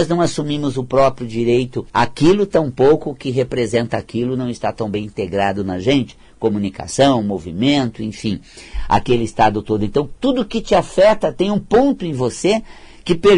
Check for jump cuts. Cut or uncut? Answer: cut